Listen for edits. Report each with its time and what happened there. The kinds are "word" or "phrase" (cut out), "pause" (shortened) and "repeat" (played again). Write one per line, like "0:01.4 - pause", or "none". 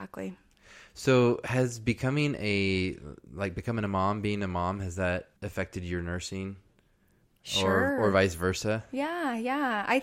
0:05.4 - pause